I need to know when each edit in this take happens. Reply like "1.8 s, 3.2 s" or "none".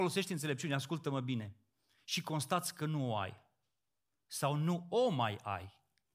none